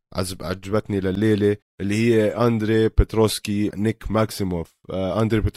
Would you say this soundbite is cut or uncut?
cut